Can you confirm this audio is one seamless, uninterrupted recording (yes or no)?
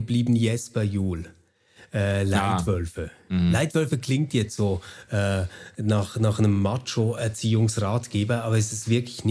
yes